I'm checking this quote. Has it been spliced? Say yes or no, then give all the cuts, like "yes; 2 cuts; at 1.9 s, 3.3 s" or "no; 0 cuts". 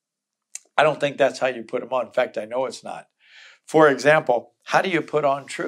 no; 0 cuts